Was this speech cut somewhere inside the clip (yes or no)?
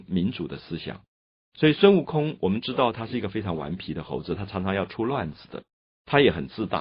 no